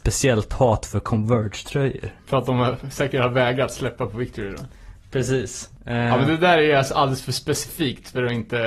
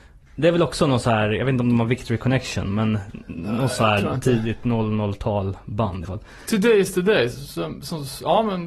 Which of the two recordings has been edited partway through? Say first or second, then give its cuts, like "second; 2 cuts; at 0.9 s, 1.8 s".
second; 1 cut; at 6.0 s